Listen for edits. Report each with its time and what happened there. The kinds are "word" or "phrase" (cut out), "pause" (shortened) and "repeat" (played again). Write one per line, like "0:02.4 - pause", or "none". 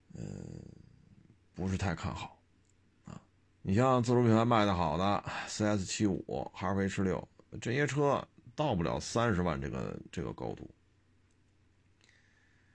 0:03.5 - pause
0:10.1 - pause